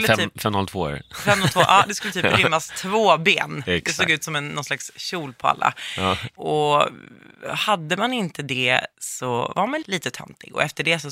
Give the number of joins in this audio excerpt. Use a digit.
1